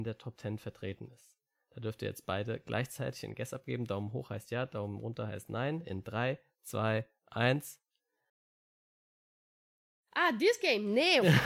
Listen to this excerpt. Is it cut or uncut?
uncut